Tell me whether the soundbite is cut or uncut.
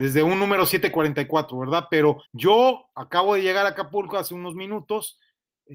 cut